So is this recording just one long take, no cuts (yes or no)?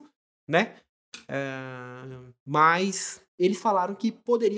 no